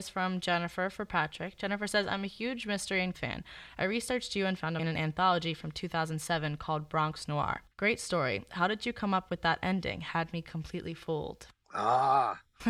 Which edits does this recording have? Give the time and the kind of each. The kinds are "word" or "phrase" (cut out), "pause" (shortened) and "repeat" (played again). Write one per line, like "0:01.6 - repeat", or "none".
0:03.1 - word
0:04.8 - phrase
0:07.7 - pause